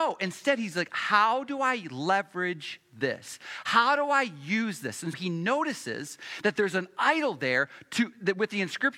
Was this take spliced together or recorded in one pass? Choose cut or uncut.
cut